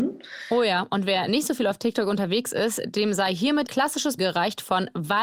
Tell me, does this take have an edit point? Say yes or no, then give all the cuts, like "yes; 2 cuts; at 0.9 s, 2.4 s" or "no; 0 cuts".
yes; 2 cuts; at 3.7 s, 4.2 s